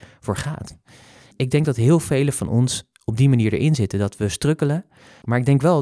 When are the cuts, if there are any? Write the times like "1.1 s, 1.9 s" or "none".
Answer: none